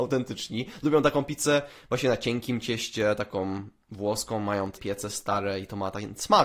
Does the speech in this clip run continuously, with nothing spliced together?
no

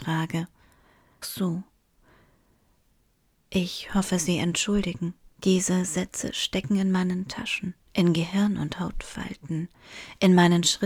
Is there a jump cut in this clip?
yes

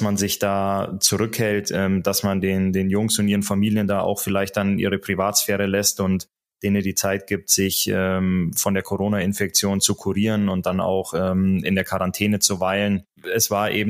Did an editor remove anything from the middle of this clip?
no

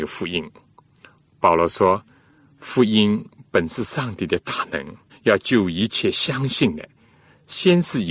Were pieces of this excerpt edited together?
yes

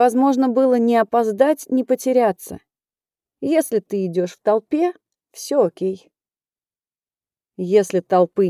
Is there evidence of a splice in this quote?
no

